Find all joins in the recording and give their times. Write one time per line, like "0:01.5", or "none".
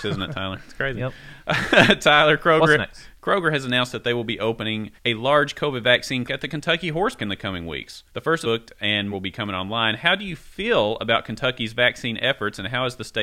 0:05.0
0:06.3
0:07.2
0:08.1
0:08.4
0:09.1